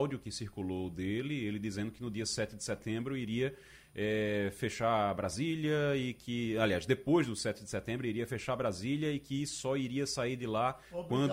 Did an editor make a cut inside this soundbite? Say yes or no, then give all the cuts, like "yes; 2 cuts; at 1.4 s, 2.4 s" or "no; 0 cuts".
no; 0 cuts